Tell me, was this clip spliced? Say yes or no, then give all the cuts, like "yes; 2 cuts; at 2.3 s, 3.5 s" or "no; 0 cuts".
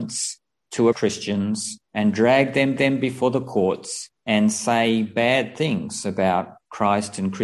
yes; 4 cuts; at 0.9 s, 1.8 s, 2.8 s, 4.2 s